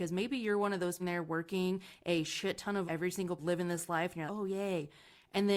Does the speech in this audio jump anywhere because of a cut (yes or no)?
yes